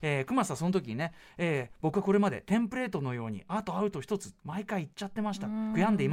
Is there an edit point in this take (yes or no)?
no